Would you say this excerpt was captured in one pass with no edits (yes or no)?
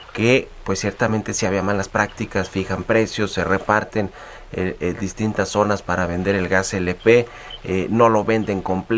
yes